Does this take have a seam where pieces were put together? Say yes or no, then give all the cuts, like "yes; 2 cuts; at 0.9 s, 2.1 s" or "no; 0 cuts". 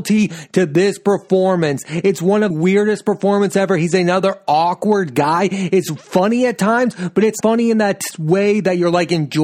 yes; 2 cuts; at 2.5 s, 7.4 s